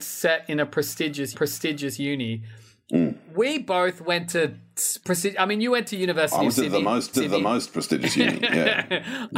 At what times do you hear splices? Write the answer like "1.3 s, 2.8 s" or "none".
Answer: 1.3 s, 5.0 s, 7.1 s